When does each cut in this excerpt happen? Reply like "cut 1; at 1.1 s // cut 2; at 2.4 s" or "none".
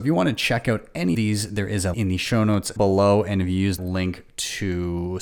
cut 1; at 1.1 s // cut 2; at 1.9 s // cut 3; at 2.8 s // cut 4; at 3.8 s

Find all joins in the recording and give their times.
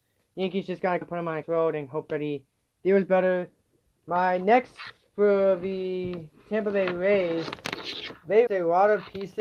cut 1; at 1.0 s // cut 2; at 1.4 s // cut 3; at 8.5 s

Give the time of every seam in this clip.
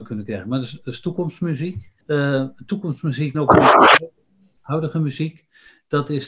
cut 1; at 2.0 s // cut 2; at 3.3 s

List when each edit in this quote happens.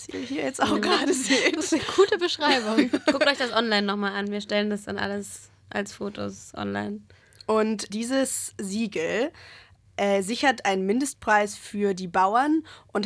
cut 1; at 7.9 s

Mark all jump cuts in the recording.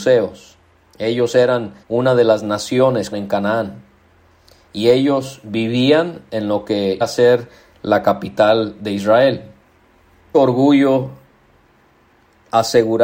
cut 1; at 1.8 s // cut 2; at 3.1 s // cut 3; at 7.0 s // cut 4; at 10.3 s

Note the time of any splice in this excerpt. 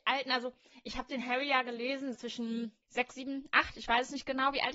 cut 1; at 2.1 s // cut 2; at 2.8 s

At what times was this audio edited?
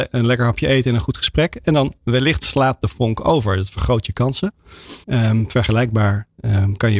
cut 1; at 5.0 s

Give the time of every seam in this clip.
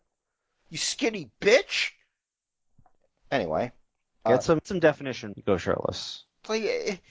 cut 1; at 4.3 s // cut 2; at 4.6 s // cut 3; at 5.3 s

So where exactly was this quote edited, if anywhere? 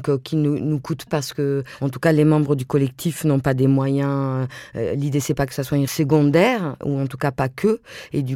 cut 1; at 1.1 s // cut 2; at 5.9 s

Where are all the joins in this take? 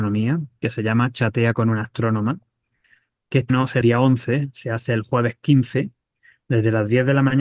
cut 1; at 3.5 s // cut 2; at 3.8 s

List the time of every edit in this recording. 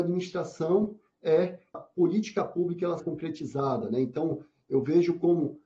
cut 1; at 1.7 s // cut 2; at 3.0 s

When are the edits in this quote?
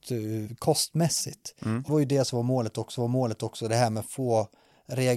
cut 1; at 1.9 s // cut 2; at 3.0 s

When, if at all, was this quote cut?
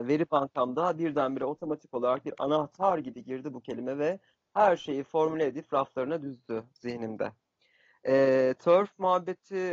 none

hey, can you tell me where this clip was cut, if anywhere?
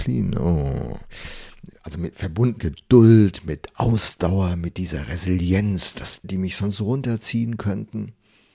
cut 1; at 2.6 s // cut 2; at 6.2 s

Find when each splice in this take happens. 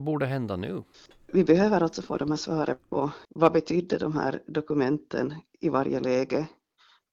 cut 1; at 0.9 s // cut 2; at 3.2 s

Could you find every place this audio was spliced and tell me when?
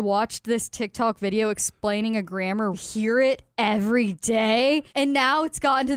cut 1; at 2.7 s // cut 2; at 4.9 s

